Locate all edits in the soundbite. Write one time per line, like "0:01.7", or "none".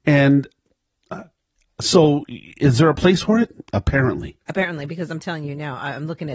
none